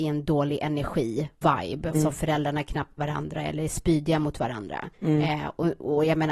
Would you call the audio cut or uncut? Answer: cut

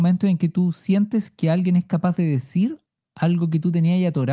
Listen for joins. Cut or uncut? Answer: uncut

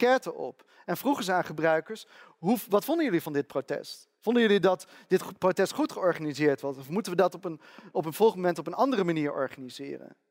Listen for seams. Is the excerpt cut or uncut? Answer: uncut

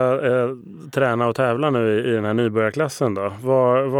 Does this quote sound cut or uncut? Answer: uncut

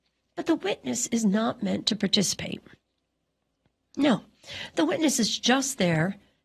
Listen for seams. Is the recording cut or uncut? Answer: uncut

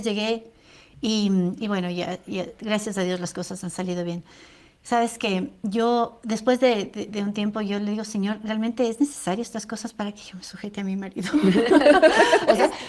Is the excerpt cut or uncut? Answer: uncut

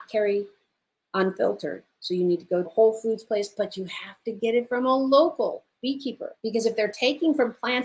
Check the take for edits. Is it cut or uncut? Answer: cut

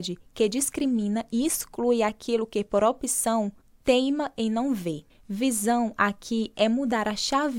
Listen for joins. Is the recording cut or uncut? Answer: cut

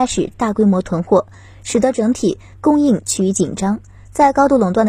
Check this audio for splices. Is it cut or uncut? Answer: uncut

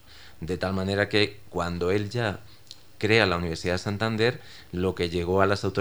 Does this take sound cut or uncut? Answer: uncut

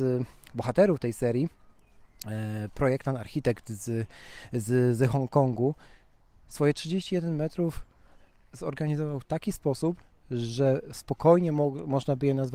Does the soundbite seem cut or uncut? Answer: uncut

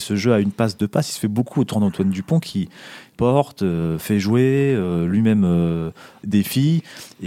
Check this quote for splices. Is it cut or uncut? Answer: uncut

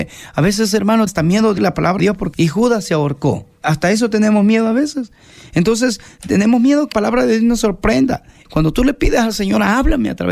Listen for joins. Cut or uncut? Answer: cut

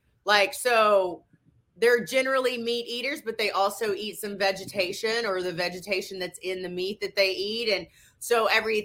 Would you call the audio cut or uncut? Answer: uncut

